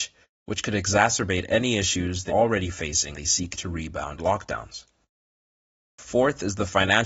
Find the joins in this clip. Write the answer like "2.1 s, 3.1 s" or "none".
2.3 s, 3.1 s, 4.2 s